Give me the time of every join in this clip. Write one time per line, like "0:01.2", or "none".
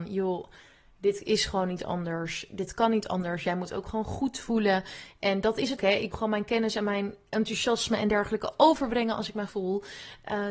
0:05.8
0:06.1
0:09.5